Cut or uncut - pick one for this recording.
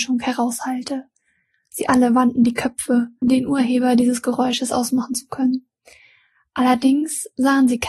cut